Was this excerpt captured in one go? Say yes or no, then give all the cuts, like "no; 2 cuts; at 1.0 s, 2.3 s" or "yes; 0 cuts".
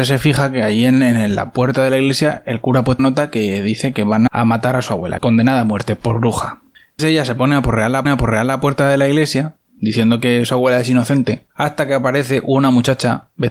no; 6 cuts; at 3.0 s, 4.3 s, 5.2 s, 7.0 s, 8.1 s, 11.5 s